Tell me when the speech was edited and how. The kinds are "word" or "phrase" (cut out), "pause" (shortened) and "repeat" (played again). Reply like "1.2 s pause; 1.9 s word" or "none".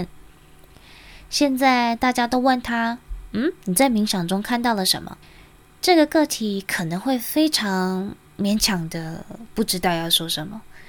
5.2 s pause